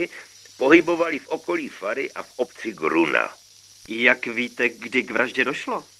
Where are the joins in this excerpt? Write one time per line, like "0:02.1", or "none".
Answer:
none